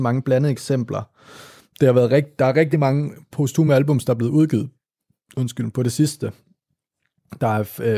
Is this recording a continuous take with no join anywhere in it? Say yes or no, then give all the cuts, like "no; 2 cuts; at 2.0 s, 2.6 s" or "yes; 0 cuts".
yes; 0 cuts